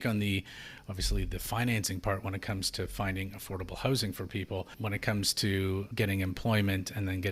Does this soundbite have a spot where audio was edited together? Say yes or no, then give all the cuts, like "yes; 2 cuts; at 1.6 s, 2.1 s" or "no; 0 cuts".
no; 0 cuts